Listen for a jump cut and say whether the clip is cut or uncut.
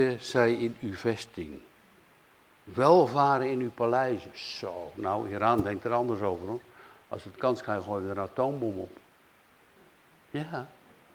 uncut